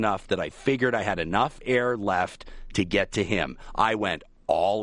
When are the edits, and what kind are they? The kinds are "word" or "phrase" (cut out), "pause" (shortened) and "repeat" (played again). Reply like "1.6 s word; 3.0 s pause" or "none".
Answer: none